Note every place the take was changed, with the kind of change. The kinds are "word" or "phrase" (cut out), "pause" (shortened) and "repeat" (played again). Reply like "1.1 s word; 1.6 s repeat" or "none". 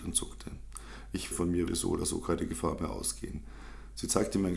1.3 s phrase; 1.7 s word